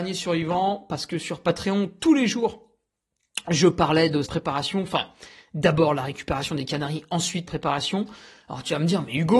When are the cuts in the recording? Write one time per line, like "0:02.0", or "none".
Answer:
0:04.2
0:07.5